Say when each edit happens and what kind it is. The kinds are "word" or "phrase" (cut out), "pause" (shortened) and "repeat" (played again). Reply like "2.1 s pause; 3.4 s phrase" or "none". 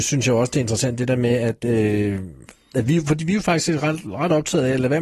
none